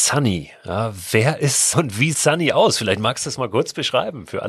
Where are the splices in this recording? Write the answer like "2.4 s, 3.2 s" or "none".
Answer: 1.7 s, 2.1 s